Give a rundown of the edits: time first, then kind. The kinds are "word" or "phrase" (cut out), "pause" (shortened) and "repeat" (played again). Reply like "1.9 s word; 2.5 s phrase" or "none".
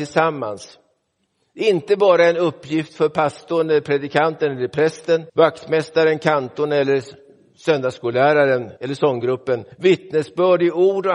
5.3 s pause; 8.8 s pause; 9.7 s pause